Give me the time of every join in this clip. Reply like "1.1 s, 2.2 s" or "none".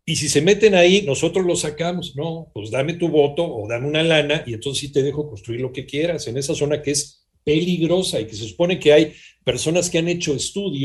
none